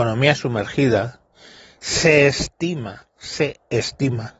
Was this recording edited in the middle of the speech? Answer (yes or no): no